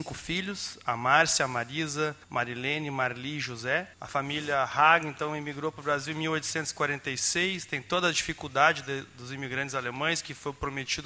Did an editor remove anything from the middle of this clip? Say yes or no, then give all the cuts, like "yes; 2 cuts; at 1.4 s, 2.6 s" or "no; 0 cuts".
yes; 2 cuts; at 2.2 s, 3.9 s